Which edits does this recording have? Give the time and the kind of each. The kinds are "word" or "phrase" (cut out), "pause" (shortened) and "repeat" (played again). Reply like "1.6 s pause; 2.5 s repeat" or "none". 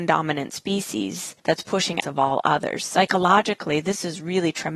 1.4 s pause; 2.0 s phrase